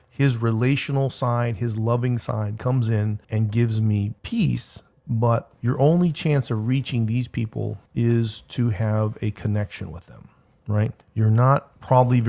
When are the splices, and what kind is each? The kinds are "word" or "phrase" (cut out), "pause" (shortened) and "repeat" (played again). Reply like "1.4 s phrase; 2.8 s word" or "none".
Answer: 3.2 s pause; 4.2 s pause; 5.6 s pause; 7.9 s pause; 11.0 s pause